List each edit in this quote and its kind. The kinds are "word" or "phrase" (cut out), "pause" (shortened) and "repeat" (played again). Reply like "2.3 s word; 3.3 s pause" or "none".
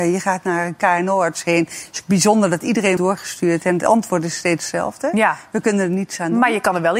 3.0 s word